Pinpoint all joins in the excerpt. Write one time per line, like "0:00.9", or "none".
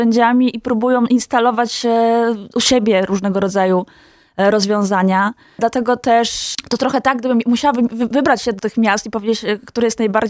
0:08.6